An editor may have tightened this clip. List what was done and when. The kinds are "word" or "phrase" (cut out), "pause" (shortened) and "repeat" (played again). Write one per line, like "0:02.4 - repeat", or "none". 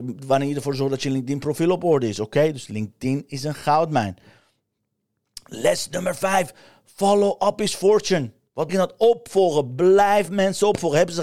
0:08.7 - word